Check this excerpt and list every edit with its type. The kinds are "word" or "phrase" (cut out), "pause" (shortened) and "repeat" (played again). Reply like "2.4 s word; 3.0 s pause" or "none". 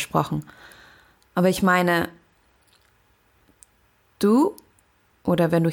none